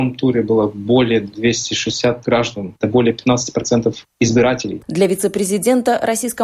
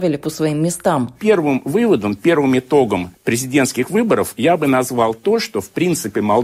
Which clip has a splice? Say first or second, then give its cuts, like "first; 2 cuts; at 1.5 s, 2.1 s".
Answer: first; 3 cuts; at 2.2 s, 2.8 s, 4.1 s